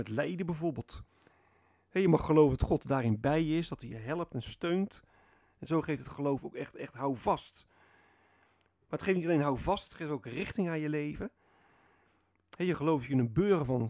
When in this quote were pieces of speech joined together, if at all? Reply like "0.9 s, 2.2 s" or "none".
none